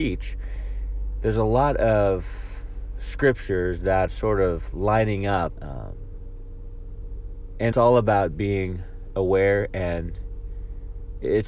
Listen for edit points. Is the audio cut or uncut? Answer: cut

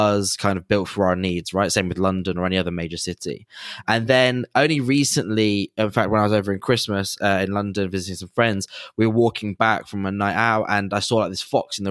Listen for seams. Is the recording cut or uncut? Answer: uncut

